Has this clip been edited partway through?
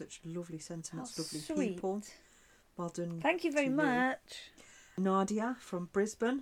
no; 0 cuts

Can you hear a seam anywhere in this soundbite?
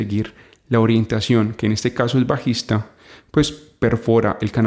no; 0 cuts

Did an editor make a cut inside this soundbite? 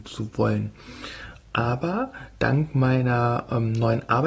no; 0 cuts

